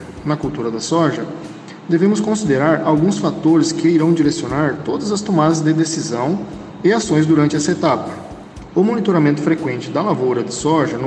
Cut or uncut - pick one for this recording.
uncut